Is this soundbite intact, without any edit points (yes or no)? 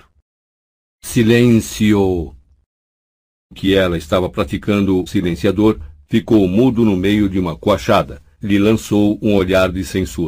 no